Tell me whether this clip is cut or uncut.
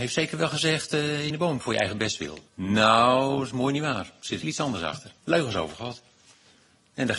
cut